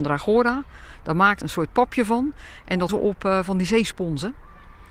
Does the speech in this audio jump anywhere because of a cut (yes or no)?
yes